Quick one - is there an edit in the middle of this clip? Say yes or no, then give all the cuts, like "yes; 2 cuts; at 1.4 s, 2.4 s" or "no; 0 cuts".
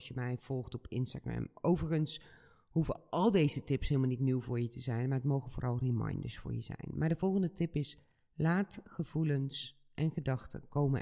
no; 0 cuts